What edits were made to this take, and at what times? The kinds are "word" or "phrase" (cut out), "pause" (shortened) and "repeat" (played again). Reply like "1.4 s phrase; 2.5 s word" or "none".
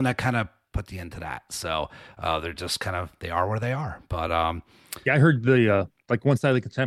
none